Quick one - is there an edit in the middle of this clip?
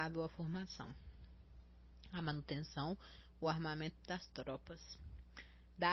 no; 0 cuts

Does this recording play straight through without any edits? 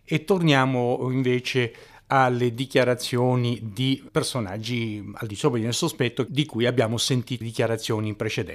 no; 2 cuts; at 4.1 s, 7.4 s

